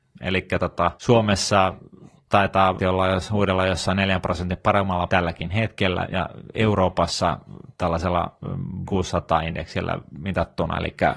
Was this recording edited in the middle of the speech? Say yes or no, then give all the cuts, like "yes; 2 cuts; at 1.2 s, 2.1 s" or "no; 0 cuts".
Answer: yes; 5 cuts; at 1.0 s, 2.8 s, 5.1 s, 6.0 s, 8.8 s